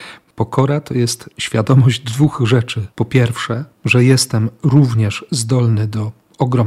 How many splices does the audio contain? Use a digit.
2